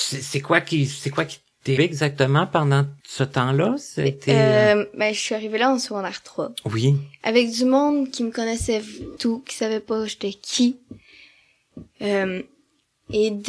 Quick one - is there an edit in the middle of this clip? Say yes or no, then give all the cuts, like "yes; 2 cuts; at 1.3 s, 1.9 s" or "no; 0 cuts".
yes; 3 cuts; at 1.8 s, 3.0 s, 9.2 s